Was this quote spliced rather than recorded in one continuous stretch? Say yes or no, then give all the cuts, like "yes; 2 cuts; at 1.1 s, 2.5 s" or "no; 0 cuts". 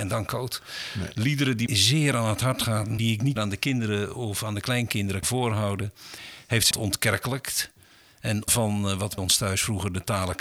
yes; 7 cuts; at 1.7 s, 3.0 s, 3.4 s, 5.2 s, 6.7 s, 8.5 s, 9.2 s